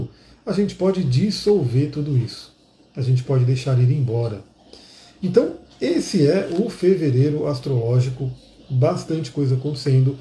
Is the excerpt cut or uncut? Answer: uncut